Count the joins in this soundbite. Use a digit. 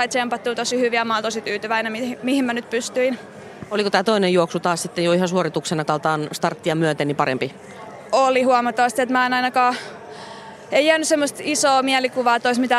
1